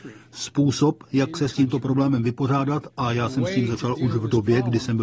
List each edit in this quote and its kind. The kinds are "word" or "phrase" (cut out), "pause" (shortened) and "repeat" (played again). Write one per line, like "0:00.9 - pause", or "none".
none